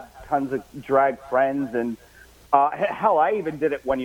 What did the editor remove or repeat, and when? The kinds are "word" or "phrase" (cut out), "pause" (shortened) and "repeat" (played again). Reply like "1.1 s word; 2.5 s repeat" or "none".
none